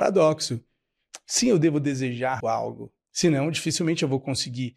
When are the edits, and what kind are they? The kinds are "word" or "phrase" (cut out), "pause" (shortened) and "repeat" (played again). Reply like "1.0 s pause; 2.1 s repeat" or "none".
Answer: 2.4 s word